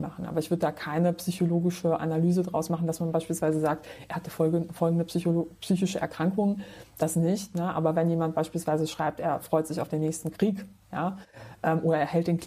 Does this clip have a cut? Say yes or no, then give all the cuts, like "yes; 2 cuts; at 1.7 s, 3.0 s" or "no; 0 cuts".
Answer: no; 0 cuts